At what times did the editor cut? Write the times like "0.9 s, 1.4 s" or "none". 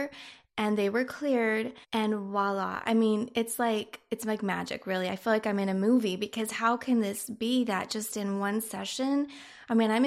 1.8 s

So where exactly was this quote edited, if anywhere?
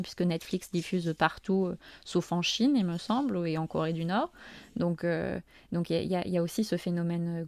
none

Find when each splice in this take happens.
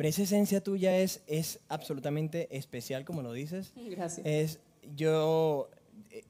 none

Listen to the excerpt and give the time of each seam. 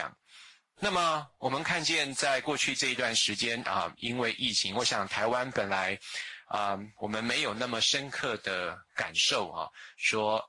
none

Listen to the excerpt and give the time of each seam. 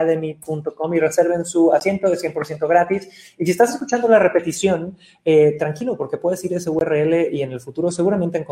none

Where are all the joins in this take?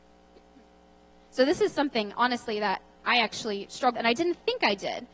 3.9 s

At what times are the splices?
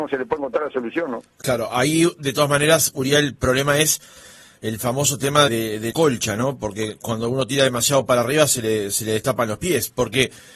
5.5 s, 5.9 s

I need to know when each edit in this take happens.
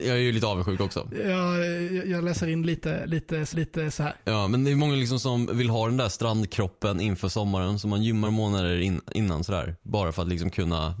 3.5 s, 8.2 s

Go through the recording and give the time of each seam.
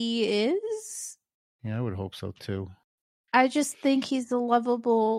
none

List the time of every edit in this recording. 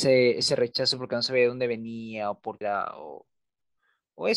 2.6 s

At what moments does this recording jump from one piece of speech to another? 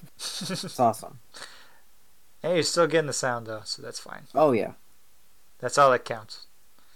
none

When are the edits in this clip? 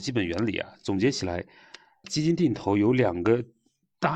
2.0 s

